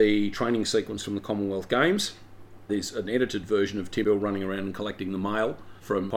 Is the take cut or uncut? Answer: cut